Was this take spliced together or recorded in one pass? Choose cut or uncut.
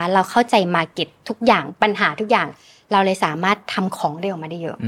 uncut